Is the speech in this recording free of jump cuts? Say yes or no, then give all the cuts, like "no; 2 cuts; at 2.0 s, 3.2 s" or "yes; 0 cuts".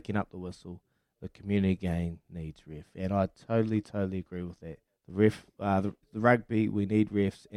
no; 2 cuts; at 4.9 s, 6.0 s